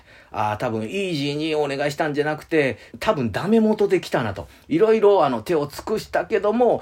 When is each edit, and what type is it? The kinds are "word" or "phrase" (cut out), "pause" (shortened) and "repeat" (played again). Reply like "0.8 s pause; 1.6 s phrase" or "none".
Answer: 2.9 s pause